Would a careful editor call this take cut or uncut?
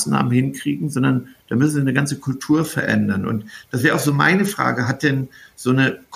uncut